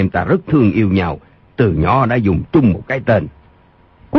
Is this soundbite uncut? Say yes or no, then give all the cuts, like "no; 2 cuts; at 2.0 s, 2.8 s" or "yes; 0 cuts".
yes; 0 cuts